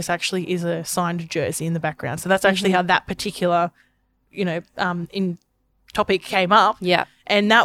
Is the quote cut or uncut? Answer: uncut